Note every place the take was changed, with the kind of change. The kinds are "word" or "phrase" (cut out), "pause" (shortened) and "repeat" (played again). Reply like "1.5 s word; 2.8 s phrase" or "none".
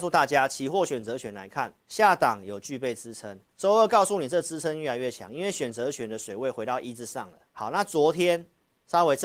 1.8 s pause; 3.5 s pause; 7.5 s pause